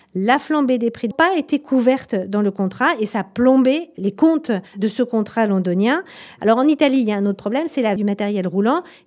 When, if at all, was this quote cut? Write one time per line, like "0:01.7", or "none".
0:01.1
0:04.7
0:08.0